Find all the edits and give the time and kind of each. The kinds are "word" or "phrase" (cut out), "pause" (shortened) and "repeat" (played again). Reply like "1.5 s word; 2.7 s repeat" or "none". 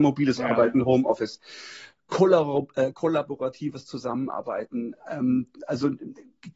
5.0 s word